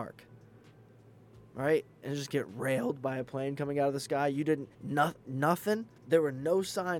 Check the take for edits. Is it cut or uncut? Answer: cut